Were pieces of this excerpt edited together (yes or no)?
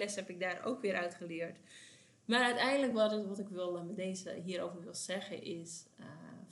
no